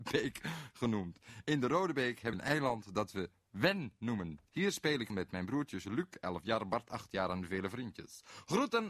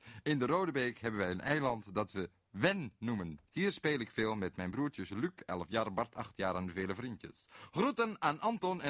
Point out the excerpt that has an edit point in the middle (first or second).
first